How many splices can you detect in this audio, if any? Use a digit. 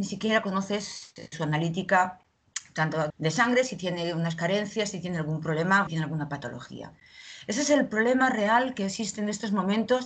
3